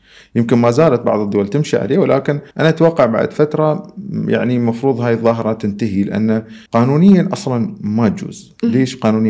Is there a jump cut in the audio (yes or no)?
yes